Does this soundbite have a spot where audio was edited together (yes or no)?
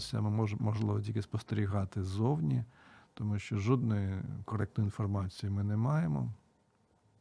no